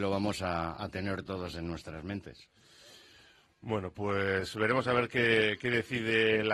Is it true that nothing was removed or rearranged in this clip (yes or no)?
yes